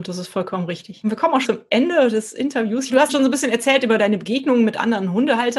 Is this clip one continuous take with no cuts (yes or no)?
no